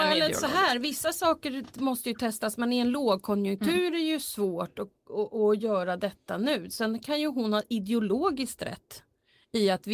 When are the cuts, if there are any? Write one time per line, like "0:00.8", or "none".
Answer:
none